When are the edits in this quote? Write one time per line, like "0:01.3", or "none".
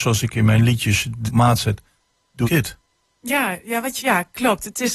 0:01.3
0:02.4
0:04.0